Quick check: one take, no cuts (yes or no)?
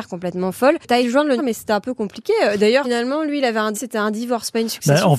no